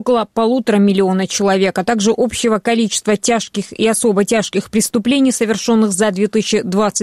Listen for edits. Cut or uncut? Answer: uncut